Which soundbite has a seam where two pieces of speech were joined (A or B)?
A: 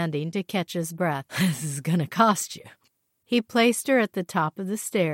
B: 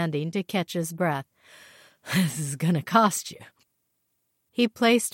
A